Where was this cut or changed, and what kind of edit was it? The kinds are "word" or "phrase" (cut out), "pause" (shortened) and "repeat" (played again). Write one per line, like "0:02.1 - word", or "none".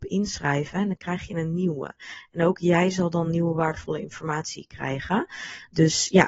none